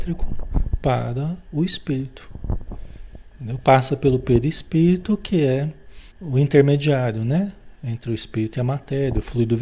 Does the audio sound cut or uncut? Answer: cut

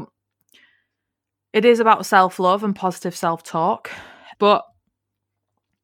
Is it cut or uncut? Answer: cut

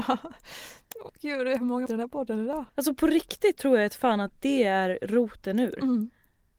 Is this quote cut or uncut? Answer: cut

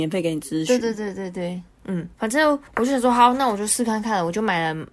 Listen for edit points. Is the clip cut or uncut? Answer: cut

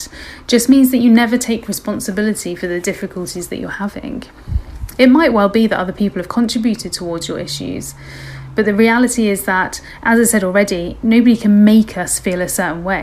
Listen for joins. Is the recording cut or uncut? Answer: uncut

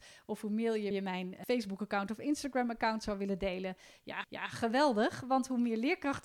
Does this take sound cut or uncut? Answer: cut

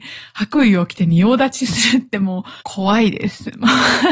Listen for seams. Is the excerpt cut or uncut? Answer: cut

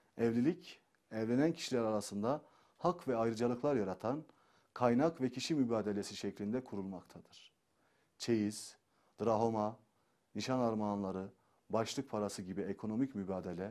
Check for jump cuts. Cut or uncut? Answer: uncut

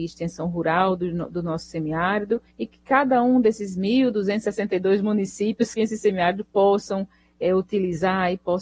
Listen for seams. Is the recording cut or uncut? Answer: cut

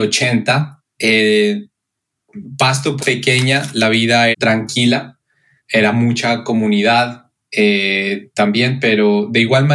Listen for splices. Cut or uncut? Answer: cut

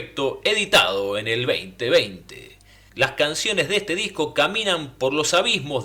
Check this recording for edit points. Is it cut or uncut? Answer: uncut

